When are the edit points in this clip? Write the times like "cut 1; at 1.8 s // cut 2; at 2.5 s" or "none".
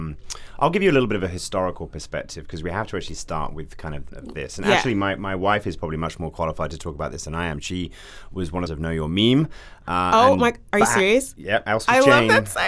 cut 1; at 4.1 s // cut 2; at 8.7 s